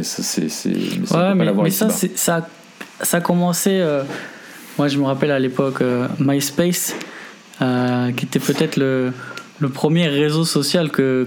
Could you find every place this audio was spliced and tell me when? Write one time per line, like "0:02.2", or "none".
0:03.0
0:09.5